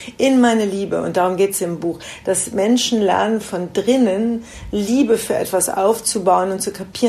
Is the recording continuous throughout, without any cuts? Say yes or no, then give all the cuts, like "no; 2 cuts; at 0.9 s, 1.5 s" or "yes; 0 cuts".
yes; 0 cuts